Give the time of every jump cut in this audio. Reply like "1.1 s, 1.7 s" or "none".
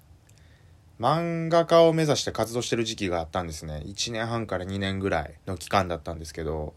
5.4 s